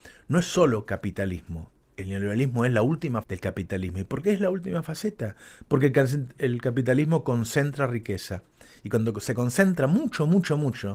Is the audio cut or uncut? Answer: cut